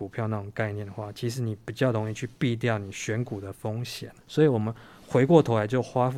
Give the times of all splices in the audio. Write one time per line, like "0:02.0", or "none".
0:04.2